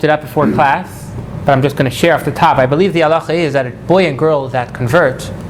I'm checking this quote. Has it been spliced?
no; 0 cuts

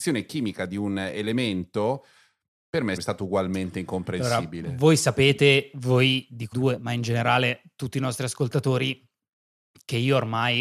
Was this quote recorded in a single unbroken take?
no; 2 cuts; at 3.0 s, 6.5 s

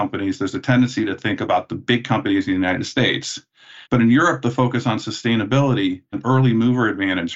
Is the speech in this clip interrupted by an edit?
yes; 2 cuts; at 3.8 s, 6.1 s

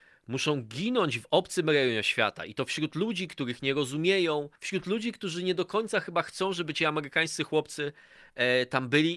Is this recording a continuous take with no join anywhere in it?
no; 1 cut; at 4.6 s

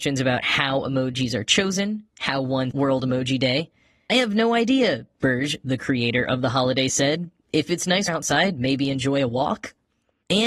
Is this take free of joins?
no; 3 cuts; at 2.7 s, 4.1 s, 8.1 s

